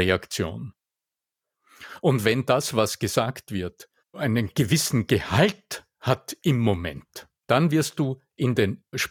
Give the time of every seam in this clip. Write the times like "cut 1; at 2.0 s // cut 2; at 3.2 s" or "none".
cut 1; at 4.0 s // cut 2; at 7.4 s